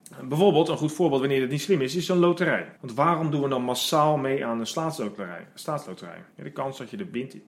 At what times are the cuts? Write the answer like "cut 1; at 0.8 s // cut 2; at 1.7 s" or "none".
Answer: cut 1; at 2.8 s // cut 2; at 6.3 s